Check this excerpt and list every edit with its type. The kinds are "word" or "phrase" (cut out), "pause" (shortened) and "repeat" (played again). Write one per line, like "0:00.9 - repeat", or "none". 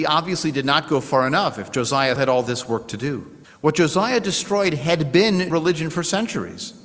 0:02.2 - word
0:03.4 - pause
0:05.5 - word

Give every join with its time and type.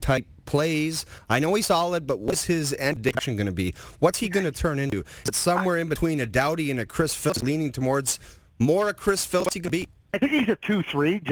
none

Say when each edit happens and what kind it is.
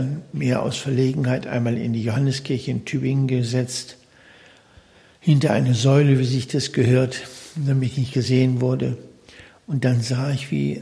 none

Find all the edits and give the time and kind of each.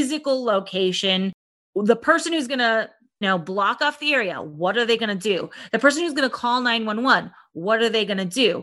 0:03.2 - word

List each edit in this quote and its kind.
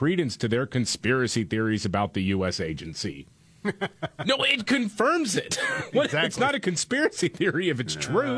none

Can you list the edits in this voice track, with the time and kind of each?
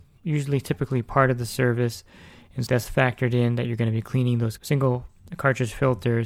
0:02.7 - word
0:04.6 - word

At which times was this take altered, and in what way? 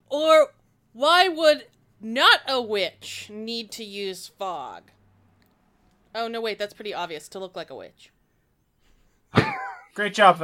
none

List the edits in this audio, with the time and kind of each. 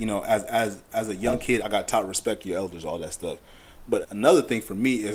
0:01.6 - word
0:04.0 - word

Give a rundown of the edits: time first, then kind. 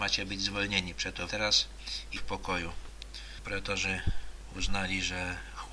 0:01.3 - word
0:02.2 - word

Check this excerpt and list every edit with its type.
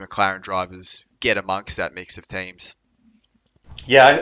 none

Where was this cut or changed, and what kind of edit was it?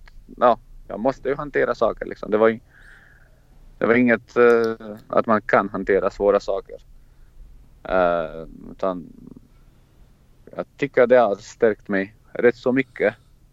0:05.1 - phrase

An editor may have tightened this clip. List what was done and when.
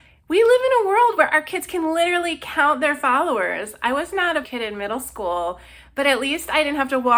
0:04.4 - word

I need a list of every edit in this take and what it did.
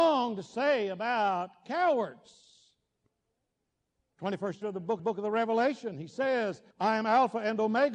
0:04.6 - word
0:05.0 - repeat
0:06.7 - pause

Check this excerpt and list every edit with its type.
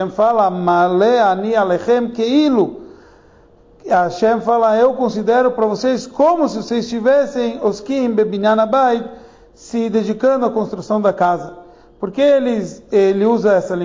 none

